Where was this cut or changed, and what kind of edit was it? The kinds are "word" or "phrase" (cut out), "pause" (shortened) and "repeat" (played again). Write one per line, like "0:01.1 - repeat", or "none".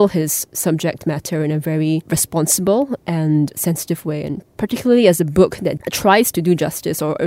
none